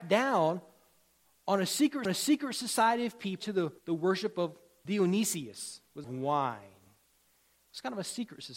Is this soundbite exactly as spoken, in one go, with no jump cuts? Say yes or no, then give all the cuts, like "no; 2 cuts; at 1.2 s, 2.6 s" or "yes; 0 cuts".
no; 5 cuts; at 2.1 s, 3.4 s, 3.8 s, 4.9 s, 6.0 s